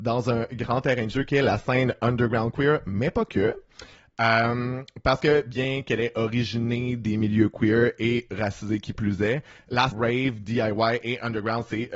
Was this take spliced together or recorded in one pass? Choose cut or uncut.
cut